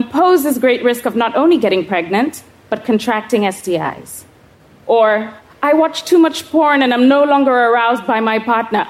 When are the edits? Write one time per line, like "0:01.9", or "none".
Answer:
none